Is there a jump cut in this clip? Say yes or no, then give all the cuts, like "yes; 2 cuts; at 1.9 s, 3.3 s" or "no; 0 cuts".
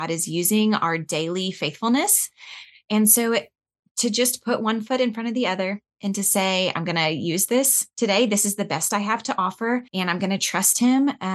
yes; 1 cut; at 9.9 s